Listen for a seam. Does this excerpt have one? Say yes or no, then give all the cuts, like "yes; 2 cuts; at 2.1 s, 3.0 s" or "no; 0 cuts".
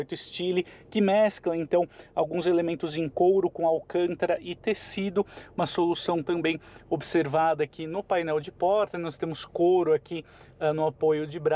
no; 0 cuts